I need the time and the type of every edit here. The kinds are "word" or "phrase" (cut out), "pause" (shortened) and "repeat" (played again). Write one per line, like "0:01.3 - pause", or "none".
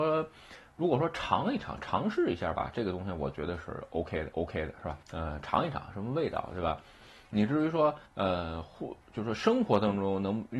0:04.3 - repeat
0:05.0 - pause
0:08.0 - pause
0:09.0 - pause